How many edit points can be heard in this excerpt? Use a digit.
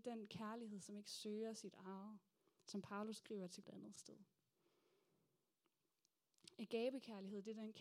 2